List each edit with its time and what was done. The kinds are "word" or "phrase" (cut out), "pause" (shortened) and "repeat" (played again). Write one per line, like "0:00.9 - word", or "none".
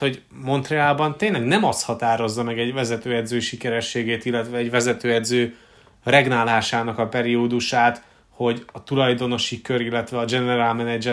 none